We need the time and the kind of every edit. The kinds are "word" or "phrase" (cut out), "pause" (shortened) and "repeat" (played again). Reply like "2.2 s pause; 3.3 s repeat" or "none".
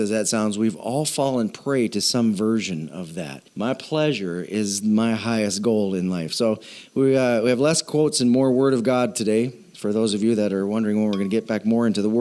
3.5 s pause